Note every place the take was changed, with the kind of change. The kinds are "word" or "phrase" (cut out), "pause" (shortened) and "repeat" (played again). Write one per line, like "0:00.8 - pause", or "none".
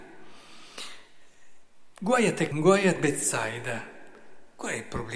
0:02.5 - word
0:03.0 - word

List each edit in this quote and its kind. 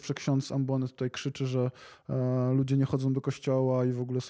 none

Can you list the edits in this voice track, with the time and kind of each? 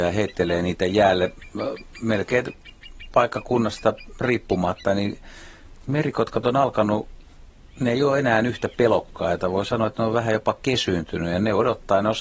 none

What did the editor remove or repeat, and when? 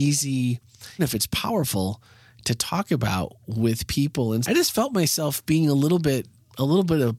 0:01.0 - word
0:04.4 - word

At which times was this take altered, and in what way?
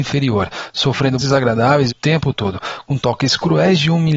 0:01.2 - word
0:01.9 - phrase

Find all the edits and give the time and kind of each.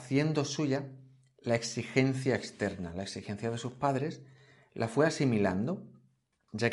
none

